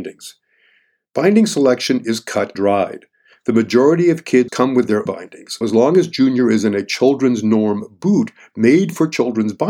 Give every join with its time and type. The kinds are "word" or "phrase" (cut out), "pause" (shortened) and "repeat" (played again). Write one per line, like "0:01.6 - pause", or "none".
0:02.6 - word
0:04.5 - word
0:05.1 - word
0:05.6 - word